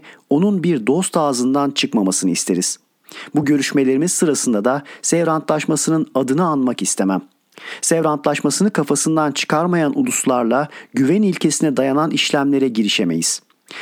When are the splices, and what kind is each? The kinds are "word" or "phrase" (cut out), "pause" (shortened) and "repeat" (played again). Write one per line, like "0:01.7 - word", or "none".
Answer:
none